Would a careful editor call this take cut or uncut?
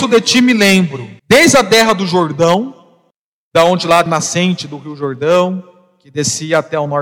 cut